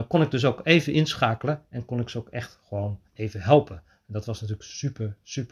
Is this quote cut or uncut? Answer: cut